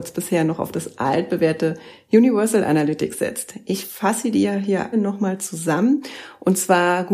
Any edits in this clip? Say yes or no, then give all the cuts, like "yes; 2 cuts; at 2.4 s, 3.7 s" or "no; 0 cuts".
yes; 1 cut; at 4.9 s